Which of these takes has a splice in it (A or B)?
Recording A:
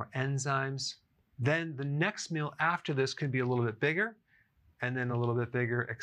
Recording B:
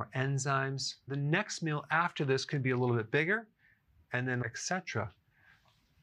B